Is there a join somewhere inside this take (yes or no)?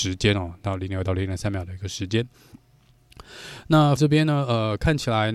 yes